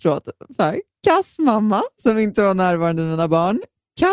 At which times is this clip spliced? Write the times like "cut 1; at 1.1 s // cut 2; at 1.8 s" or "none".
none